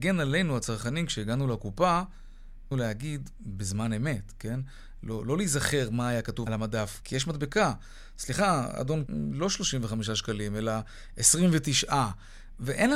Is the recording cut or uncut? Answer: cut